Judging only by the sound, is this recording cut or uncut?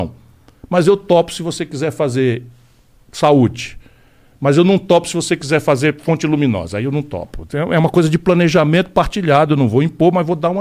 uncut